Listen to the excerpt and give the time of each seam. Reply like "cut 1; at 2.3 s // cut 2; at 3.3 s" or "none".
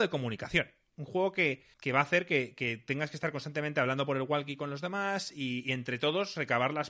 cut 1; at 1.7 s

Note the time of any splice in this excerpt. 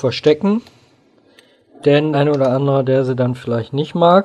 cut 1; at 2.1 s

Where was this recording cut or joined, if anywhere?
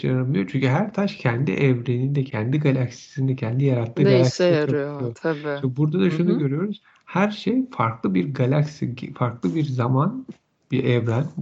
none

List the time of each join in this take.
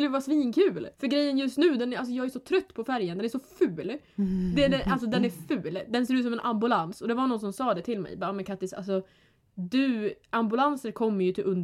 cut 1; at 0.9 s

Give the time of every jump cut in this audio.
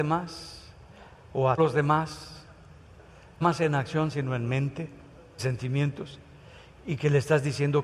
cut 1; at 1.6 s // cut 2; at 3.4 s // cut 3; at 5.4 s

